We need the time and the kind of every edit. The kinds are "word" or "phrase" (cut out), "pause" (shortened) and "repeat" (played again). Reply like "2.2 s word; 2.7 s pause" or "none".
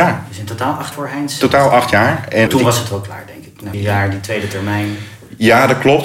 0.9 s word; 2.5 s word; 3.7 s word